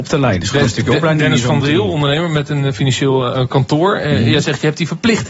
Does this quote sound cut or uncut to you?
uncut